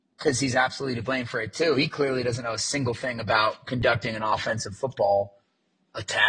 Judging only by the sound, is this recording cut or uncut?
uncut